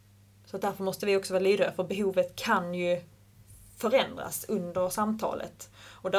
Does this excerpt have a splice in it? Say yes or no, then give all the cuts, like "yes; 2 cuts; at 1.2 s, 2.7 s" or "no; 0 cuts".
no; 0 cuts